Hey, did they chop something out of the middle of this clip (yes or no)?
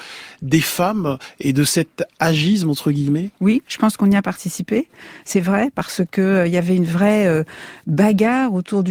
yes